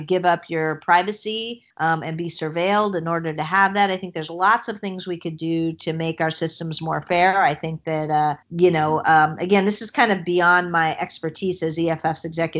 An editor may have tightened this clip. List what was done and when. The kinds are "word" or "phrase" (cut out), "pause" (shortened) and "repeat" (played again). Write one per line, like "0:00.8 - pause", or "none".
0:01.7 - pause
0:08.4 - pause